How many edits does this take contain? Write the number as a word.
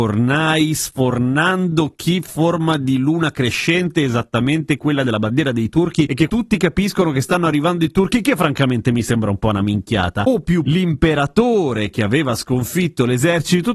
four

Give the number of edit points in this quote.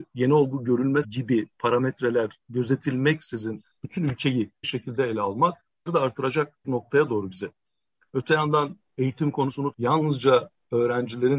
six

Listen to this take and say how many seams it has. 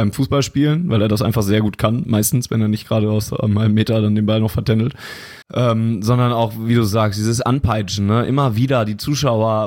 one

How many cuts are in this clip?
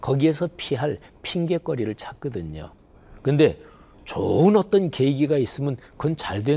zero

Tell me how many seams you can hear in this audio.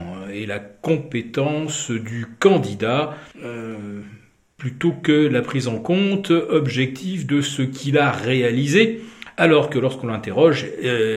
one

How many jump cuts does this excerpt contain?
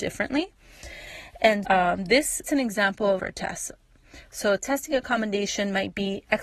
three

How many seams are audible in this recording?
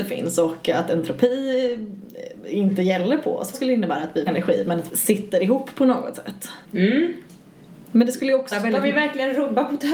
five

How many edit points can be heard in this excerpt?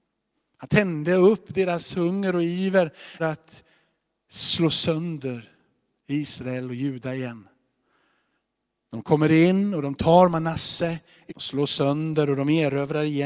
two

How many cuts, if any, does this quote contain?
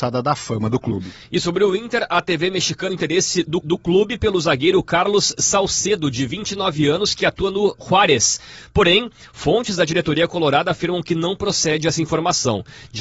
two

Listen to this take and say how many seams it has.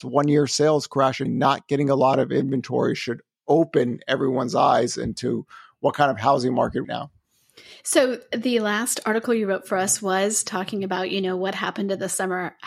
two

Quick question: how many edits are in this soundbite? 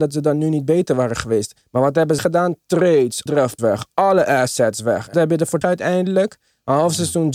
five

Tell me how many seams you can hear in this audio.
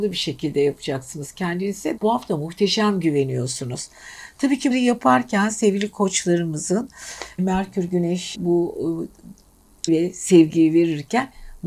five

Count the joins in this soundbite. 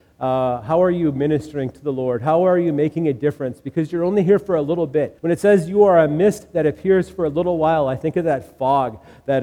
one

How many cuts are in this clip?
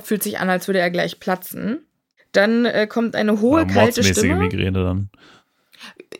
zero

